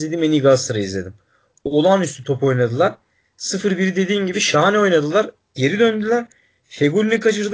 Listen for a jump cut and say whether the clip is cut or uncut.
uncut